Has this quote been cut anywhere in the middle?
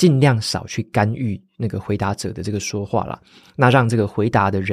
no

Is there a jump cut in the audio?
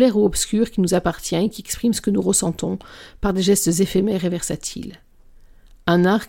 no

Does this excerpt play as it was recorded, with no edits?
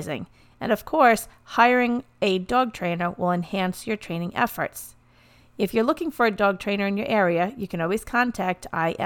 yes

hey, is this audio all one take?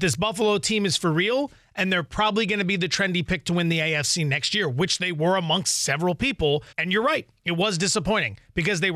no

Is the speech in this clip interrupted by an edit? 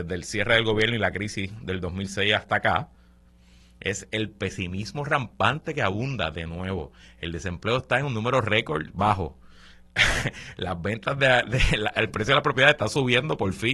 no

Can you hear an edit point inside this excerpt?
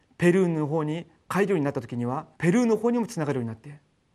yes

